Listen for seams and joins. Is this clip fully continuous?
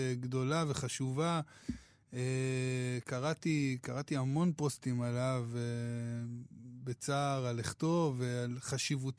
yes; 0 cuts

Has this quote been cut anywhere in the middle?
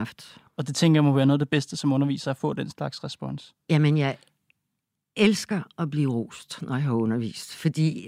no; 0 cuts

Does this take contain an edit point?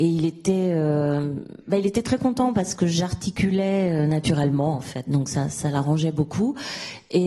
no; 0 cuts

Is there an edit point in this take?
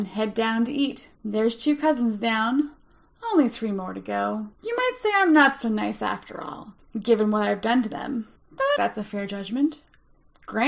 yes; 3 cuts; at 1.1 s, 4.5 s, 8.8 s

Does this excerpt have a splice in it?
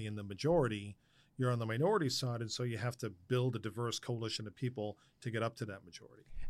no; 0 cuts

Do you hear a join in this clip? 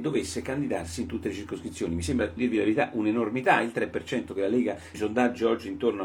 yes; 3 cuts; at 2.4 s, 4.3 s, 4.9 s

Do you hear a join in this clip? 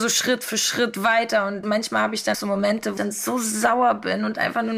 yes; 3 cuts; at 1.6 s, 2.3 s, 3.0 s

